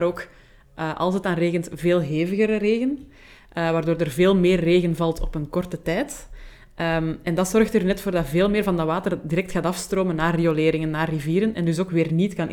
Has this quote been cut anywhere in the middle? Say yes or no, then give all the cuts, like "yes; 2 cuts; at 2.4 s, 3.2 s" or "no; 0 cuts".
no; 0 cuts